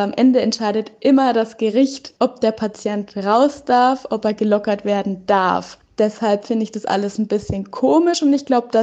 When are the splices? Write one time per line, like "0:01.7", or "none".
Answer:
0:02.2

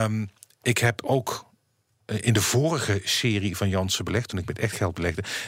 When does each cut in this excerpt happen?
none

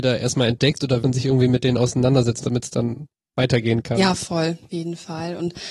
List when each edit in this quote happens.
0:01.0
0:02.4
0:04.7

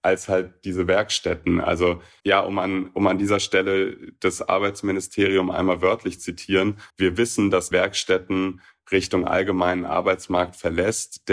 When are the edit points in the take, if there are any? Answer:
0:02.2
0:06.2
0:06.9
0:07.7

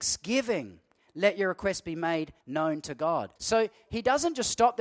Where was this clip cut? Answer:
0:02.4
0:03.4

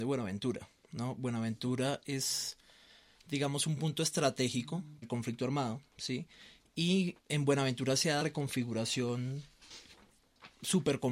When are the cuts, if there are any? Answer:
0:05.0
0:07.2
0:08.2

